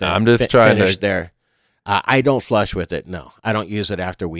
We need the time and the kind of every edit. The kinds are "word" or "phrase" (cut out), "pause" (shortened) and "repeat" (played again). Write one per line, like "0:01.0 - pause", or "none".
none